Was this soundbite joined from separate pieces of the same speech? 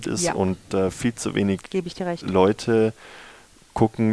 no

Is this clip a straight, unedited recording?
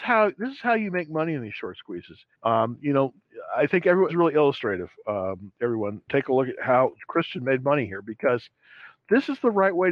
no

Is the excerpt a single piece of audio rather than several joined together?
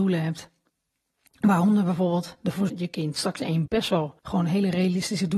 no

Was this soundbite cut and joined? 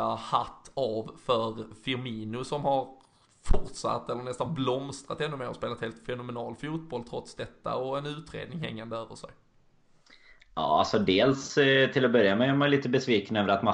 no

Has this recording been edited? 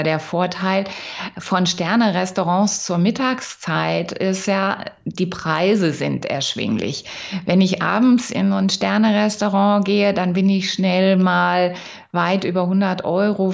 no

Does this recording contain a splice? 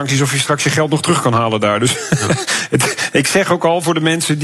no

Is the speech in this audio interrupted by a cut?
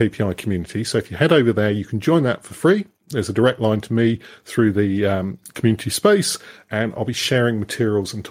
no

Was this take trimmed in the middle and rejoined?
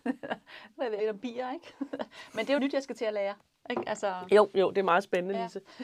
yes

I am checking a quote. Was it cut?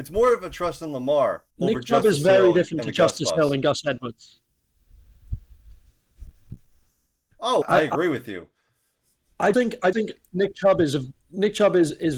yes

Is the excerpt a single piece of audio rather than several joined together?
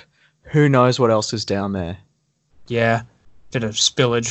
yes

